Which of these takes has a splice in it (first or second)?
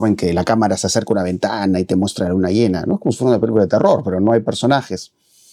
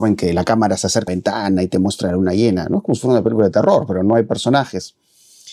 second